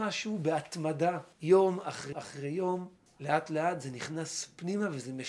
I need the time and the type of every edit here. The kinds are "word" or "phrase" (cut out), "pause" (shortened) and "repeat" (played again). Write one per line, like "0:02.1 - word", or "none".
0:01.3 - pause
0:02.1 - word
0:03.1 - pause